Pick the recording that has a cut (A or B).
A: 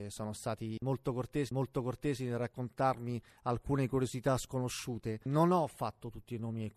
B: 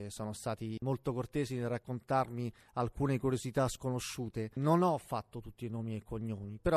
A